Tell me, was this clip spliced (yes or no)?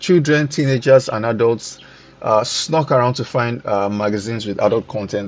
no